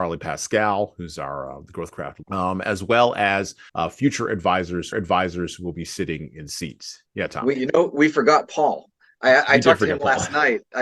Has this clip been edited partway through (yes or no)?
yes